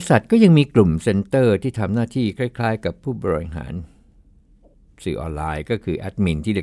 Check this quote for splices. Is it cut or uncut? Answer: uncut